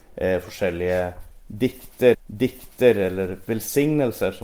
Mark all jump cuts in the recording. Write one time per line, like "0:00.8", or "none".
0:02.1